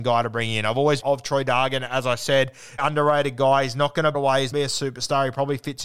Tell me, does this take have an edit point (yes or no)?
yes